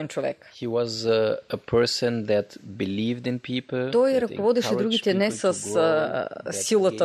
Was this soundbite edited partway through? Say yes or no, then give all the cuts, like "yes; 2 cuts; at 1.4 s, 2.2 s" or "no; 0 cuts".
no; 0 cuts